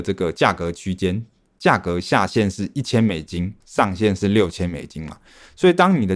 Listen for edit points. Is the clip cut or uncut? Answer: uncut